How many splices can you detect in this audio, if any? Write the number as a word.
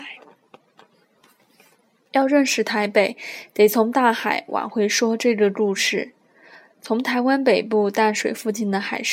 zero